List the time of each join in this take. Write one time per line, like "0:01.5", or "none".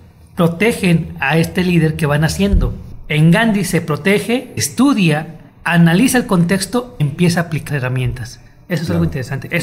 0:04.6
0:07.0
0:07.7